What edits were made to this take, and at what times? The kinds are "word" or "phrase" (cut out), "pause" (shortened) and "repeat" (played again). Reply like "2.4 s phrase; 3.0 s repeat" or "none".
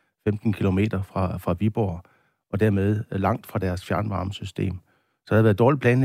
none